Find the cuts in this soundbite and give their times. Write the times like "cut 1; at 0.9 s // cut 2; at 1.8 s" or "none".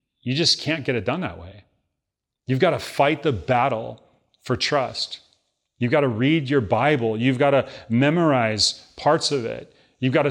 none